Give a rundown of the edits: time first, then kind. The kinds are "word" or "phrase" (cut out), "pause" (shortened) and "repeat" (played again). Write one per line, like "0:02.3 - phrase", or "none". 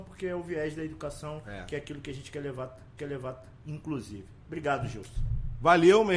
0:03.0 - repeat

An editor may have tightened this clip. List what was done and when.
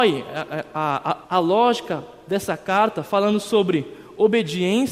0:01.2 - pause

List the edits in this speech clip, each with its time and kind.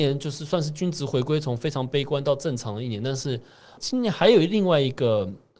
none

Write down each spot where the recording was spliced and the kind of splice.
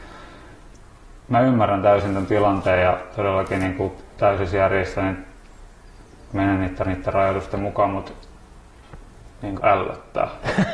0:06.8 - repeat
0:09.6 - word

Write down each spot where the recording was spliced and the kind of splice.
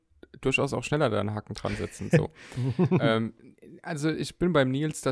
none

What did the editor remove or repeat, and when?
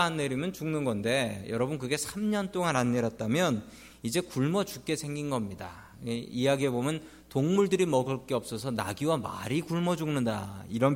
none

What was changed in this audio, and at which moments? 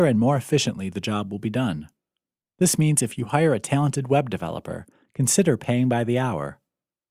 none

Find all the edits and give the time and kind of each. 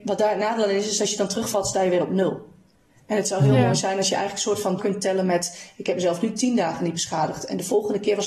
0:04.8 - word

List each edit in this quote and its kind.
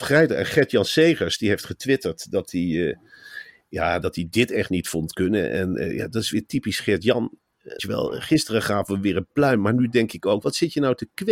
0:04.0 - word
0:07.8 - word
0:10.4 - word

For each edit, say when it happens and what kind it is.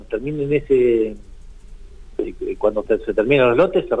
0:02.9 - word

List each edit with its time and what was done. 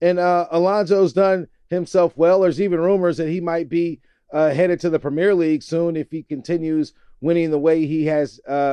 none

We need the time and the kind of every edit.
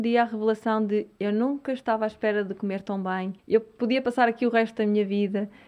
0:03.4 - pause

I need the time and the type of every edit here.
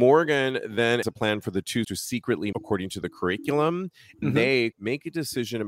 0:01.0 - word
0:01.8 - word
0:02.5 - word
0:04.2 - word
0:04.7 - word

